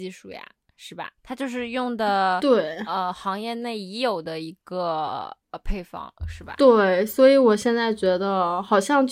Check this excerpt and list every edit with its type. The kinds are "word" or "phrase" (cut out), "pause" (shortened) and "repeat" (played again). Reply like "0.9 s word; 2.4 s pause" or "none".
1.2 s pause; 5.4 s pause